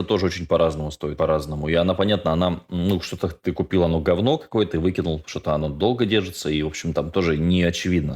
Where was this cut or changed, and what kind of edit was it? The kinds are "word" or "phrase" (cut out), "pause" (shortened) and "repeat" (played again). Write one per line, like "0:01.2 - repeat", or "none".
0:01.2 - word